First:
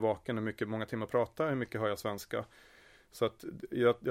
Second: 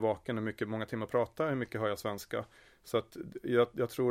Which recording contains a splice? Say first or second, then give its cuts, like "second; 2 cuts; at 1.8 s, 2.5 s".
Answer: second; 1 cut; at 2.6 s